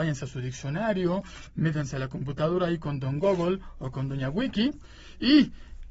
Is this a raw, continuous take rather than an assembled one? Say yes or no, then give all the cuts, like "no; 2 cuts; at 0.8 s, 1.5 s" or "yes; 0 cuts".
yes; 0 cuts